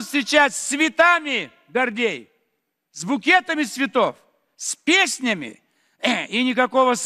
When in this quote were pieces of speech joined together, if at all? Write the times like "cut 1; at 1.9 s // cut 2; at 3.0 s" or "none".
none